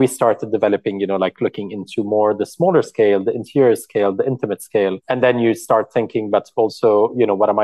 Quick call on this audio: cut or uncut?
cut